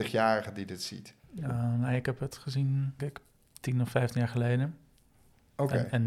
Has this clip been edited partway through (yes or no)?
yes